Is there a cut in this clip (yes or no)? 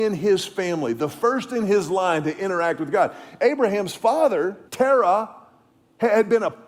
yes